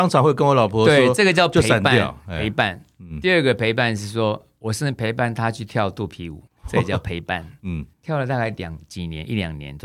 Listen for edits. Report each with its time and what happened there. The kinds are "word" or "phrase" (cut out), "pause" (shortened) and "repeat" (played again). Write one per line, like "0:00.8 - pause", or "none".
0:06.5 - pause
0:07.9 - pause